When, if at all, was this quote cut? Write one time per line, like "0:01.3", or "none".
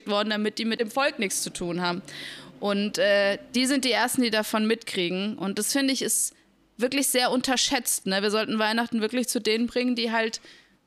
none

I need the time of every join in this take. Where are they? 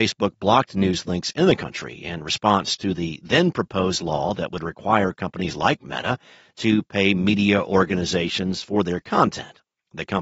none

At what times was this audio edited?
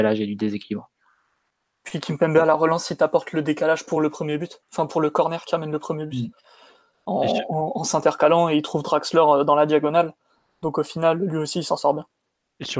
none

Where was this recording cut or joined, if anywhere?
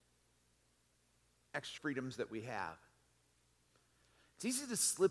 0:01.8

